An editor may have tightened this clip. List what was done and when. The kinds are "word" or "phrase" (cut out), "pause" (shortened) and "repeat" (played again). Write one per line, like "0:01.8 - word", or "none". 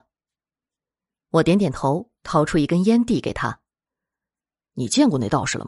0:03.9 - pause